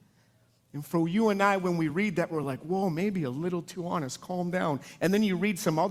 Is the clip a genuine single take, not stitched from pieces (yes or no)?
yes